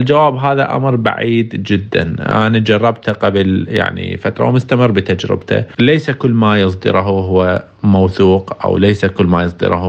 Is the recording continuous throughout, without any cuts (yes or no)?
yes